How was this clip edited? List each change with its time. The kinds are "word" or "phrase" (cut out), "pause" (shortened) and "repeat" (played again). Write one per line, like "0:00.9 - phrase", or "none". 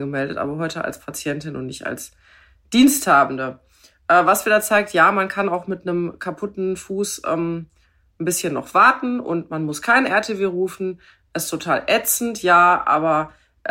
none